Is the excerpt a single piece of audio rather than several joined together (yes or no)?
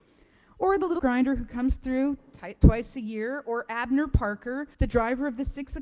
no